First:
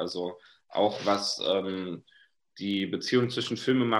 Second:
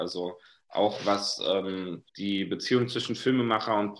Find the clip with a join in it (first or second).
second